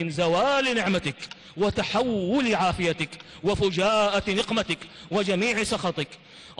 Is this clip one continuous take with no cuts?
yes; 0 cuts

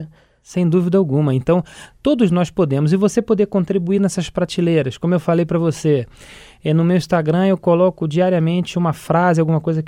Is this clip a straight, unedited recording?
yes; 0 cuts

